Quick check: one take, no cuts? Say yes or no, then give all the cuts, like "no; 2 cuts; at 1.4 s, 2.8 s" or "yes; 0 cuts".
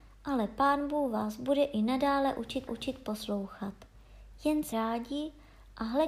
no; 2 cuts; at 2.7 s, 4.7 s